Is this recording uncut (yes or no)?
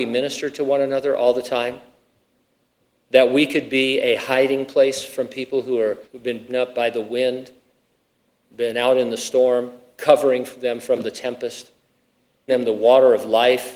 no